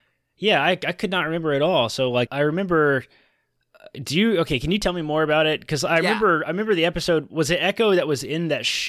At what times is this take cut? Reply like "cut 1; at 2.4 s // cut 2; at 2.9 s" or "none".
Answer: cut 1; at 2.3 s

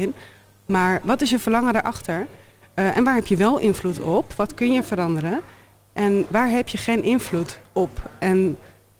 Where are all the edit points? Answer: cut 1; at 1.0 s // cut 2; at 6.3 s

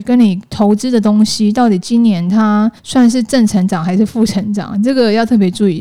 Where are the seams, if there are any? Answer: cut 1; at 2.8 s

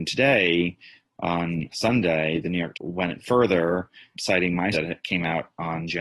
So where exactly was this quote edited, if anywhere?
cut 1; at 1.7 s // cut 2; at 2.7 s // cut 3; at 4.1 s // cut 4; at 4.7 s

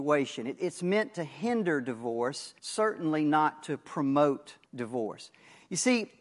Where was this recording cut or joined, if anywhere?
cut 1; at 2.6 s // cut 2; at 4.6 s

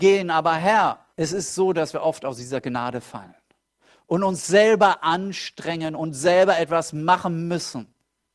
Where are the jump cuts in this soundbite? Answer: cut 1; at 1.1 s

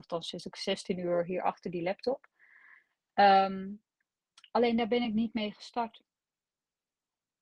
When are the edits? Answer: none

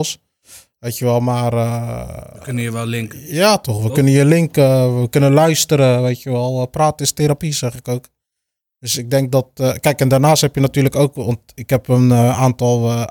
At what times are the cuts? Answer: none

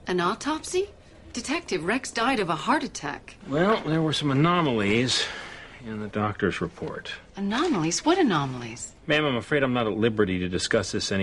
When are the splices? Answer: cut 1; at 3.4 s

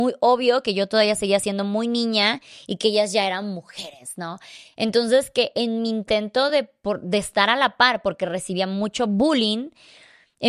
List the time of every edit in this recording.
none

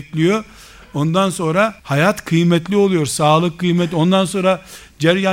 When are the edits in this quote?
cut 1; at 1.8 s

